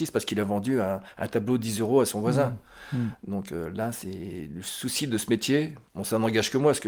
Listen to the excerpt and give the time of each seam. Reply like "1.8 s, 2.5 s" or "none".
5.9 s